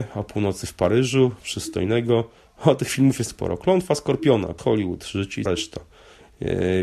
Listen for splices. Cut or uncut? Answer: cut